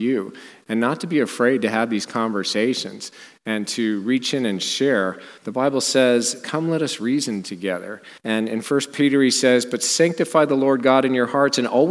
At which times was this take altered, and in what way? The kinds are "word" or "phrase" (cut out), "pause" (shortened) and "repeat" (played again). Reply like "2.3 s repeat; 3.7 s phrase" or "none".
5.4 s pause; 8.2 s pause